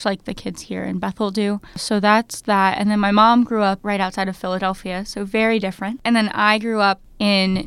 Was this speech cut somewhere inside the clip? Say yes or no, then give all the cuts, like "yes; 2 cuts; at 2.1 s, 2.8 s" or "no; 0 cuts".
yes; 1 cut; at 1.7 s